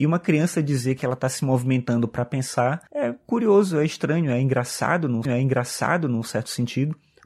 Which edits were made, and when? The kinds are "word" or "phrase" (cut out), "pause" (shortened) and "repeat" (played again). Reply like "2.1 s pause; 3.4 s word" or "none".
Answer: 2.9 s pause; 5.2 s repeat